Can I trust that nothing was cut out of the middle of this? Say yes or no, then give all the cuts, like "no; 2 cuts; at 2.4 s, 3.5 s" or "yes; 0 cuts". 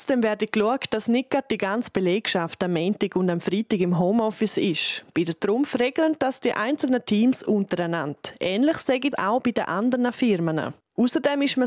no; 1 cut; at 9.1 s